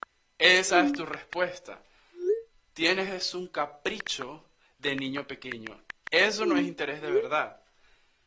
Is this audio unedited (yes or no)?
yes